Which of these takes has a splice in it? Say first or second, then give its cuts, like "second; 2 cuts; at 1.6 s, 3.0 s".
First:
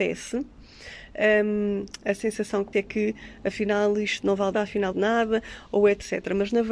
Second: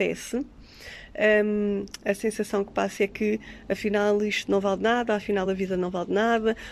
first; 3 cuts; at 2.7 s, 4.5 s, 4.9 s